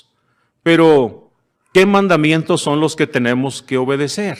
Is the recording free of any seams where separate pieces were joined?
yes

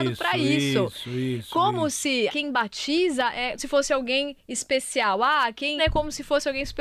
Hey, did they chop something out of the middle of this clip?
yes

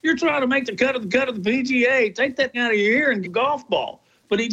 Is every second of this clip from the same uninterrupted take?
no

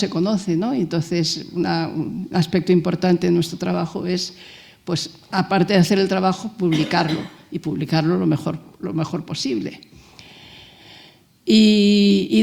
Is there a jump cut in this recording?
no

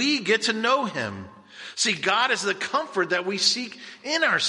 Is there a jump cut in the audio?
no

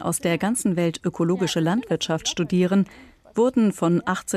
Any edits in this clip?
no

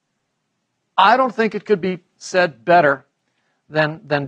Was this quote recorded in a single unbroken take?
yes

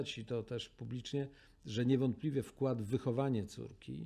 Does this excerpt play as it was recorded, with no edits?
yes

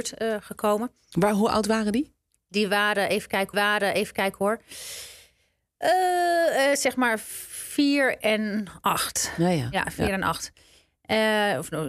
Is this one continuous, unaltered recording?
no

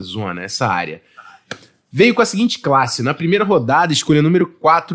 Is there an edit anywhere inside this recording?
no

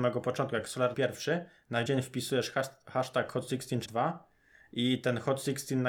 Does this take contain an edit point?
yes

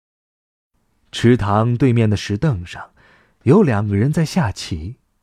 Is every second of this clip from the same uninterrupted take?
yes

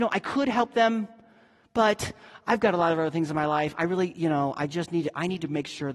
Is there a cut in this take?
no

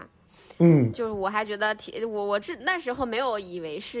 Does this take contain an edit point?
yes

